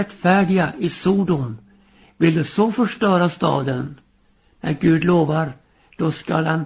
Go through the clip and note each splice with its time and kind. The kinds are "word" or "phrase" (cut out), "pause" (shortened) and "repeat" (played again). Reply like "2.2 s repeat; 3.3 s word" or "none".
none